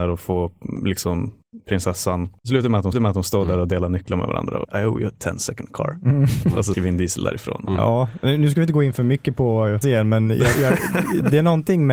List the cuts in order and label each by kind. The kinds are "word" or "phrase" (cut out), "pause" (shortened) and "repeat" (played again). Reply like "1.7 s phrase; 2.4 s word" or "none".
2.9 s repeat; 4.6 s word; 6.7 s word; 9.8 s word; 10.5 s word